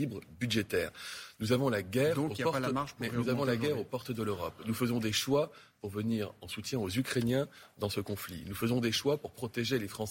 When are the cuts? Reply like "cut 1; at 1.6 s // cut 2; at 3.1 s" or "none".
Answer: none